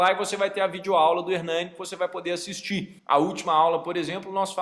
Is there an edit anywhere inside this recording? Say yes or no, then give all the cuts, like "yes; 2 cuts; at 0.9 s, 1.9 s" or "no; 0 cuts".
yes; 1 cut; at 3.0 s